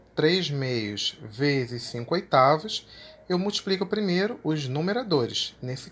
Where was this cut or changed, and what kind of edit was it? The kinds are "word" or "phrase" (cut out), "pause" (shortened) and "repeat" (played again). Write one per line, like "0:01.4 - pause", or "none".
none